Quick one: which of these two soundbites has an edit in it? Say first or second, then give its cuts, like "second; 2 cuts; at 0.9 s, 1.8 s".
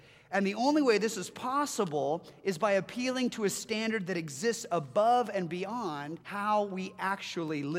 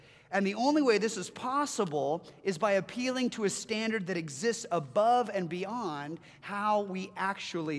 first; 1 cut; at 6.2 s